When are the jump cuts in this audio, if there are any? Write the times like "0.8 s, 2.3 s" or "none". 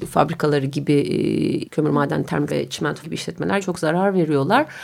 1.7 s, 2.5 s, 3.0 s, 3.6 s